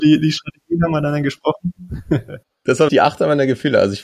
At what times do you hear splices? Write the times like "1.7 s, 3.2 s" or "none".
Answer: 2.9 s